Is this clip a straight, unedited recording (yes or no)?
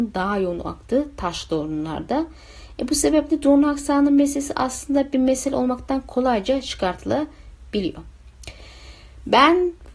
yes